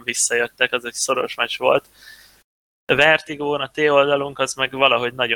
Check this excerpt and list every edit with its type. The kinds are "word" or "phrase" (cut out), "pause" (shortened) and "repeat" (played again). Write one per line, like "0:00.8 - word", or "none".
none